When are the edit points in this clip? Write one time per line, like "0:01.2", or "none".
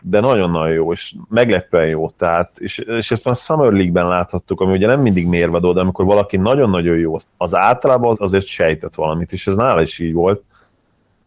0:07.2
0:08.1